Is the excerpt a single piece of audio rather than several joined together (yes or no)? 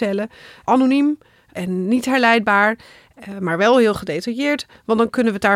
yes